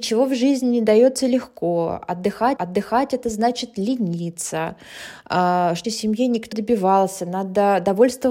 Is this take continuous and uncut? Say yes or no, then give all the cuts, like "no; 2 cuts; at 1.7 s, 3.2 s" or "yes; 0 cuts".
no; 3 cuts; at 2.6 s, 5.8 s, 6.5 s